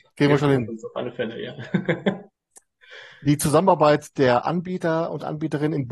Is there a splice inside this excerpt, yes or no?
yes